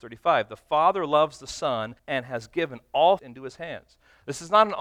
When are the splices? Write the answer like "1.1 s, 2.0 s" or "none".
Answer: 2.0 s, 3.2 s

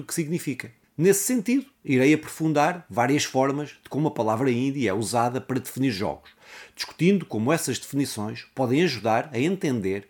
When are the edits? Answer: none

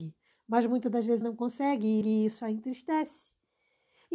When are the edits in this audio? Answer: 1.2 s, 2.0 s

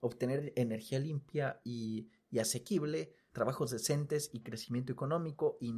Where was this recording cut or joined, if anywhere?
none

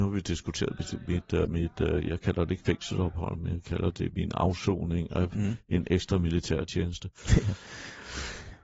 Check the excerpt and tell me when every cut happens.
1.4 s

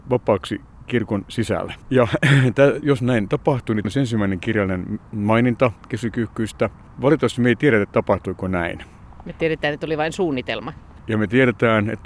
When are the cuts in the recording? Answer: 1.8 s, 2.8 s, 3.3 s, 3.8 s, 5.1 s, 6.9 s, 7.8 s

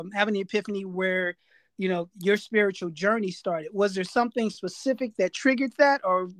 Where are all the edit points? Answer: none

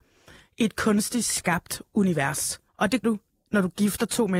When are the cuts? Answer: 2.7 s, 3.0 s

